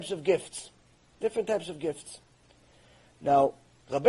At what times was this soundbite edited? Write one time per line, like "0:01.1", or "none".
none

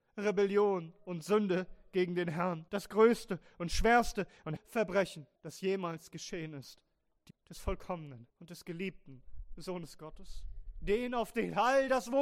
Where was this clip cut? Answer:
0:02.7
0:04.6
0:05.4
0:07.3
0:08.3

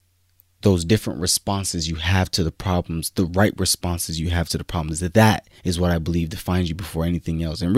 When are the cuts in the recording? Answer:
0:05.6

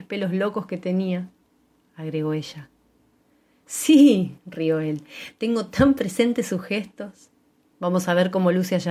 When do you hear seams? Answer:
none

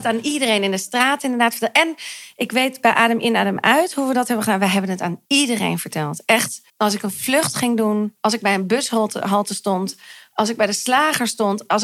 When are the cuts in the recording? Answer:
0:05.3
0:06.7

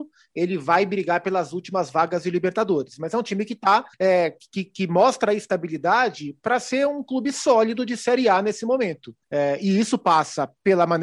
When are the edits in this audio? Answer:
0:03.9
0:09.2

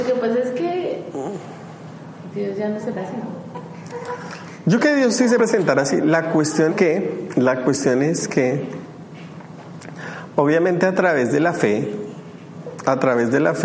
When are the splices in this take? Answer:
0:02.9
0:04.8
0:05.4
0:06.7

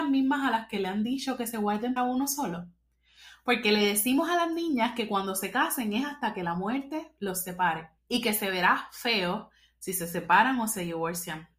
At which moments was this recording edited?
0:02.0
0:08.0

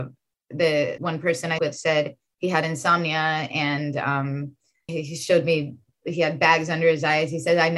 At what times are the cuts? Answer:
0:01.0
0:01.6
0:04.9

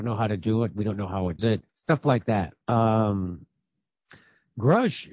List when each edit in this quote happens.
0:01.4
0:01.7
0:02.6

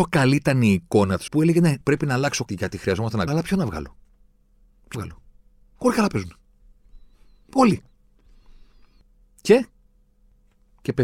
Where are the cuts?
0:01.3
0:01.8
0:02.5
0:03.3
0:04.9

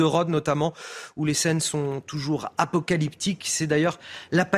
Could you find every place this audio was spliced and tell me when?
none

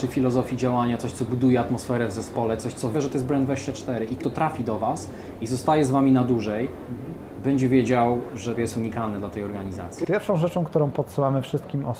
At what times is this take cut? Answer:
0:02.9
0:04.2
0:08.6

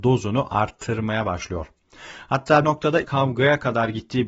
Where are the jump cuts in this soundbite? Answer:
0:02.6
0:03.0

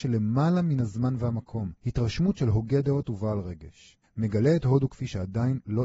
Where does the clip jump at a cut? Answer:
0:01.8
0:04.0

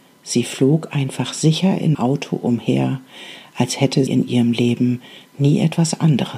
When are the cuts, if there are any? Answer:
0:01.9
0:04.1

